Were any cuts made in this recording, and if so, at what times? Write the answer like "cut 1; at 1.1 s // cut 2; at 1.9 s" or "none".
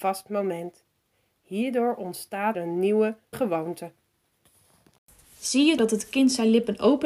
cut 1; at 2.5 s // cut 2; at 3.3 s // cut 3; at 5.8 s